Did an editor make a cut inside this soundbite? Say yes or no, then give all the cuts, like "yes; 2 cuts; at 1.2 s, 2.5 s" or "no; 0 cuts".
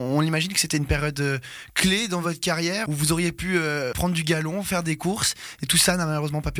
no; 0 cuts